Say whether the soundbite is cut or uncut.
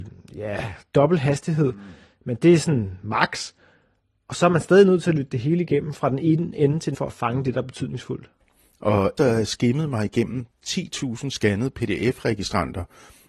cut